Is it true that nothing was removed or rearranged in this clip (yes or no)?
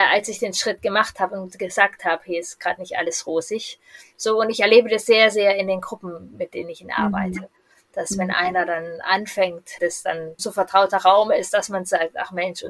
no